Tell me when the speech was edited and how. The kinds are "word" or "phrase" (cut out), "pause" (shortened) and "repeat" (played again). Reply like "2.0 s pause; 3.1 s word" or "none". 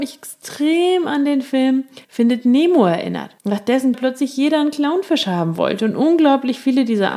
2.0 s pause; 3.4 s pause; 3.9 s phrase